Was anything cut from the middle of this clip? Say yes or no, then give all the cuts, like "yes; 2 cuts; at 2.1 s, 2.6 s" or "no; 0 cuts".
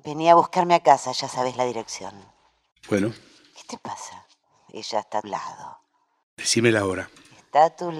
yes; 2 cuts; at 4.4 s, 5.2 s